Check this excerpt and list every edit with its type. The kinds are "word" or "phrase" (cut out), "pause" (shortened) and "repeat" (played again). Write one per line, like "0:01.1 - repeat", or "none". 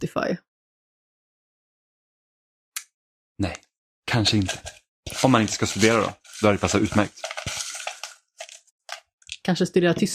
none